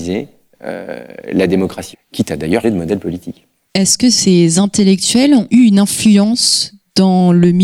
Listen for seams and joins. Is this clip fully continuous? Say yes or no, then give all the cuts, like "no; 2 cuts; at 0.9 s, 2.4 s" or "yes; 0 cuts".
no; 3 cuts; at 1.9 s, 2.6 s, 5.5 s